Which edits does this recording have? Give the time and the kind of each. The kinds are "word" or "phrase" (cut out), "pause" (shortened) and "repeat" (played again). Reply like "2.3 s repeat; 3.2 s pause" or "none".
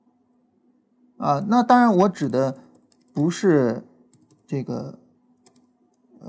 none